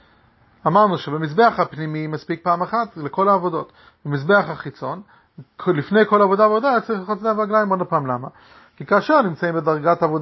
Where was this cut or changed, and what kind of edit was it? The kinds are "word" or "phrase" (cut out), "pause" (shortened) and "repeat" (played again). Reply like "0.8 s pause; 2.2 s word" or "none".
none